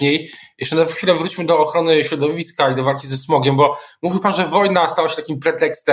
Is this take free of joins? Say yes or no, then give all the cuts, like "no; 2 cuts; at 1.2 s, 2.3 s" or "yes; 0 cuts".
yes; 0 cuts